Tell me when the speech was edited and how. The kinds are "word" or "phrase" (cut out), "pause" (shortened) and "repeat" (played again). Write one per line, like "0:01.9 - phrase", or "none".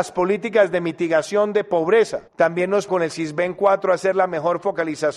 0:02.3 - pause
0:02.9 - word